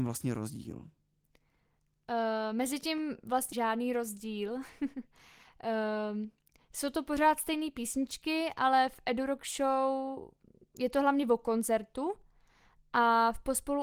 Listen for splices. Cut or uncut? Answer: cut